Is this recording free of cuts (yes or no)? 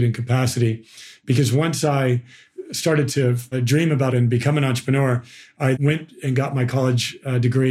no